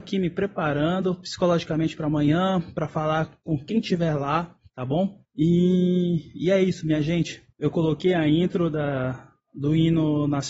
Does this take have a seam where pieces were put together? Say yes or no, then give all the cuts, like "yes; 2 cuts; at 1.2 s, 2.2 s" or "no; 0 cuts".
yes; 3 cuts; at 4.6 s, 5.3 s, 7.5 s